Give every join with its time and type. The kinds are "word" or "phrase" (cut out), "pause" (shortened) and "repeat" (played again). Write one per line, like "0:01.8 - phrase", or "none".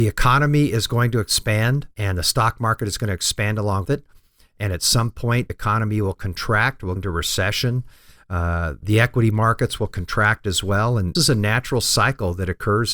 0:01.9 - pause
0:03.8 - word
0:05.5 - word
0:07.0 - word
0:08.8 - phrase
0:11.2 - word